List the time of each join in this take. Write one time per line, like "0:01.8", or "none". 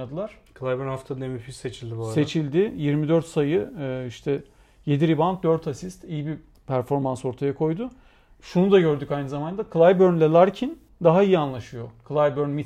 none

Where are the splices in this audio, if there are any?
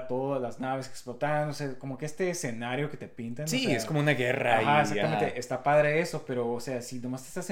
none

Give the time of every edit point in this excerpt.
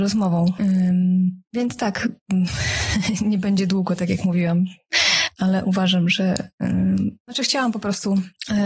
none

